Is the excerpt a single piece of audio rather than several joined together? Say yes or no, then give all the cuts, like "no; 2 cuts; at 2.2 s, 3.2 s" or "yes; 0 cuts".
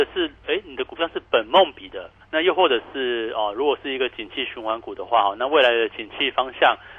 no; 1 cut; at 2.2 s